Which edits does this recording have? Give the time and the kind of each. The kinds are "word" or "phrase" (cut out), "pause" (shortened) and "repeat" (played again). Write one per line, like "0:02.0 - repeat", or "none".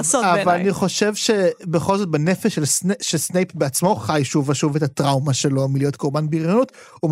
none